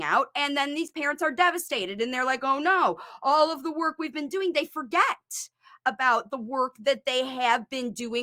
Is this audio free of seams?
yes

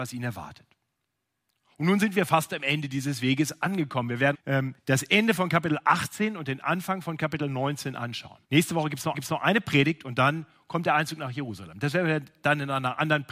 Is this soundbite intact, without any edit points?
no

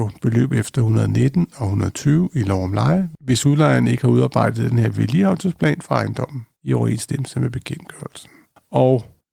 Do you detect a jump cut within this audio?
no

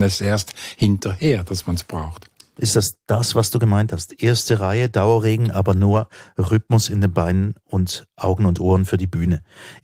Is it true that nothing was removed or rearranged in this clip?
yes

